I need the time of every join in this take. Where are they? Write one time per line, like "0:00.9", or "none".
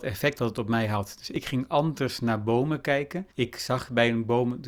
0:03.3